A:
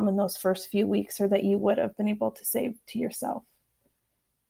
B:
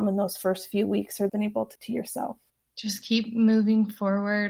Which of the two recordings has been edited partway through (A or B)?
B